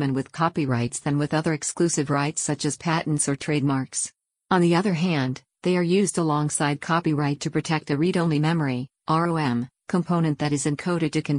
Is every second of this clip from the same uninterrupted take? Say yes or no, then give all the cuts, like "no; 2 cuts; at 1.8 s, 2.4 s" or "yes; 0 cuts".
yes; 0 cuts